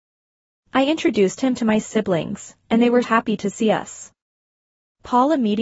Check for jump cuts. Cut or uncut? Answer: cut